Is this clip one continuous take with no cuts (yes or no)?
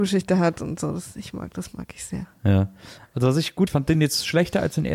no